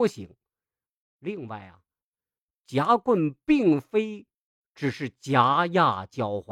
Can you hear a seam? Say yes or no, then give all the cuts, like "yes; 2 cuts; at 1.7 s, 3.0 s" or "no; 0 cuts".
no; 0 cuts